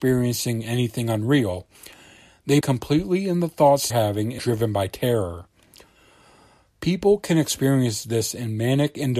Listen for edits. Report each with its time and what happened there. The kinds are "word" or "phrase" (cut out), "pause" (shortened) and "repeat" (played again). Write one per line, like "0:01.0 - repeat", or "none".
0:02.6 - word
0:03.9 - word
0:04.4 - word